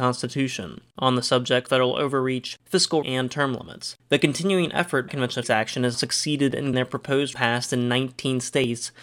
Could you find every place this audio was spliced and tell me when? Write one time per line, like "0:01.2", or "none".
0:01.7
0:03.0
0:05.1
0:05.4
0:05.9
0:06.7
0:07.3